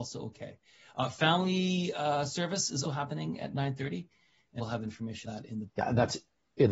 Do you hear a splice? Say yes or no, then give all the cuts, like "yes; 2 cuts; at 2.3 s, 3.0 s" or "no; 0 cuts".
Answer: yes; 4 cuts; at 2.8 s, 4.6 s, 5.2 s, 5.7 s